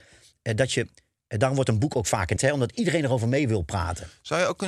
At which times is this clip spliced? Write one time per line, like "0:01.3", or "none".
0:02.4